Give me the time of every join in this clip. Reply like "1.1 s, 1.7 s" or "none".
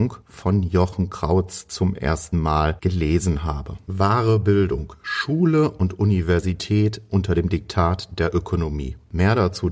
none